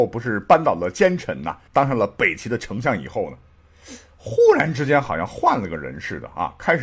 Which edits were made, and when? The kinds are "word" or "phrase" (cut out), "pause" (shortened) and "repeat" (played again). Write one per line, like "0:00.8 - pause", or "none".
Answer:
0:01.7 - pause